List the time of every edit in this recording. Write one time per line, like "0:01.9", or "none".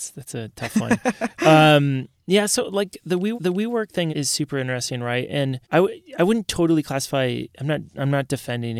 0:03.3
0:04.1
0:05.6